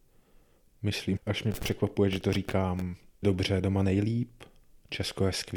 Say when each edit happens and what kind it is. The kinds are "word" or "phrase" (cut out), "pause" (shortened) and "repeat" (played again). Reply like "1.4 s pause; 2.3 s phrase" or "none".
1.2 s word; 3.2 s word